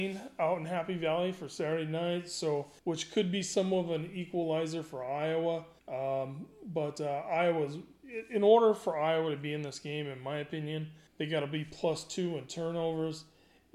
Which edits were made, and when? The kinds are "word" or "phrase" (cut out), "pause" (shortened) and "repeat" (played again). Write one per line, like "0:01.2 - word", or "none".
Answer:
0:02.8 - pause
0:05.8 - pause
0:11.1 - pause